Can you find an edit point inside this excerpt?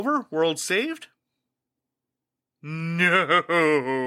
no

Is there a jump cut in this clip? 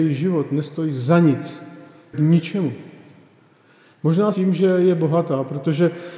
yes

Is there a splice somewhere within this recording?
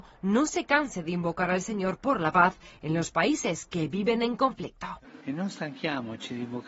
yes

